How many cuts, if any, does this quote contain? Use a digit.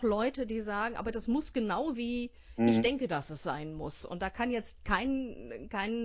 1